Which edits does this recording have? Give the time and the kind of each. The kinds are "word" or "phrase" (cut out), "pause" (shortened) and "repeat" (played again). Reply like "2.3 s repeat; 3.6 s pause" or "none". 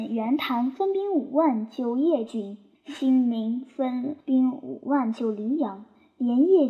2.7 s pause; 4.2 s pause